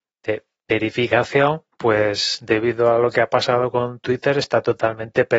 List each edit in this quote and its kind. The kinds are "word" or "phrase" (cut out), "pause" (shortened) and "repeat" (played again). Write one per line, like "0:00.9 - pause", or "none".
0:01.7 - pause